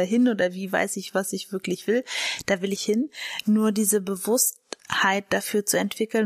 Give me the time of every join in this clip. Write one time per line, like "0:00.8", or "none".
0:02.8